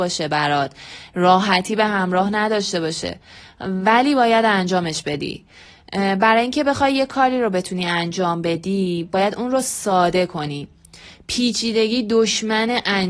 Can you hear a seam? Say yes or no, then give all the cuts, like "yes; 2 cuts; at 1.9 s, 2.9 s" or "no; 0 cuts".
no; 0 cuts